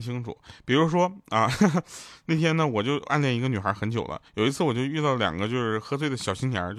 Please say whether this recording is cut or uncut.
cut